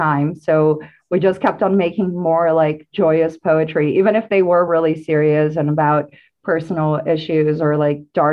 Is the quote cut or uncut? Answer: uncut